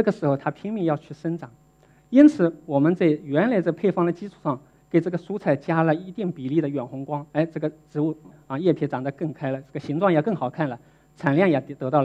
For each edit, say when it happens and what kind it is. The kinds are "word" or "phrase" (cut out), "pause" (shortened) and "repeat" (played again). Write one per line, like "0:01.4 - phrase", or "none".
0:07.3 - pause